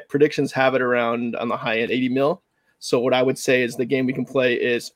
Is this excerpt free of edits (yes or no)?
yes